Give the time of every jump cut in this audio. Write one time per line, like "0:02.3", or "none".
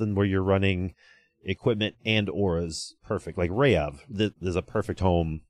none

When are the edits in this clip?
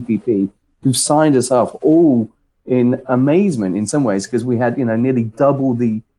none

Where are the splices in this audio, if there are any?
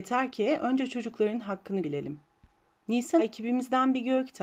0:01.8
0:03.2

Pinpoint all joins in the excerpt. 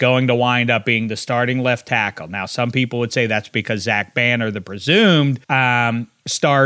0:05.4

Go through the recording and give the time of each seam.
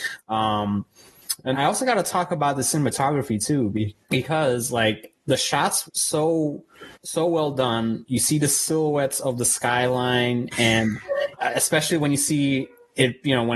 0:01.5
0:04.0
0:05.9
0:06.9
0:11.4

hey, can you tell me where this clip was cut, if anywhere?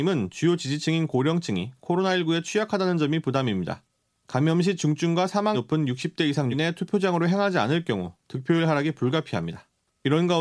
0:05.5
0:06.5

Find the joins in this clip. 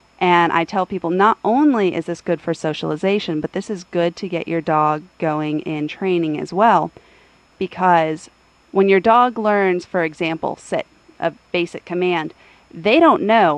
none

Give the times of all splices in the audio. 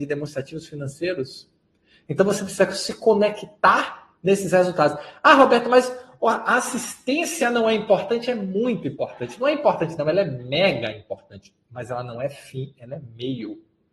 none

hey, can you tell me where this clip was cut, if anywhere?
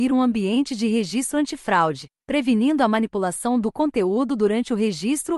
none

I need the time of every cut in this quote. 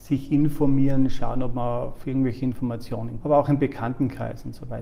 0:03.2

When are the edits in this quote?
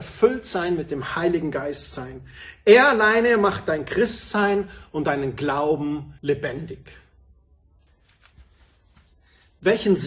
0:06.2

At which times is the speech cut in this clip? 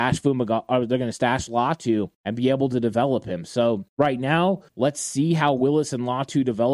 0:02.1
0:03.9
0:04.7

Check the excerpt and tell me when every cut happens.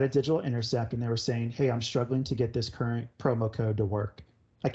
none

